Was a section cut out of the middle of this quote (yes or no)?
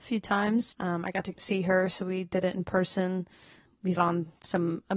yes